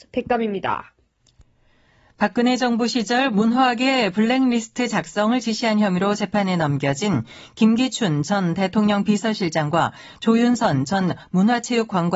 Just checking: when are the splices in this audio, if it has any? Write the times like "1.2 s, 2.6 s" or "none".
none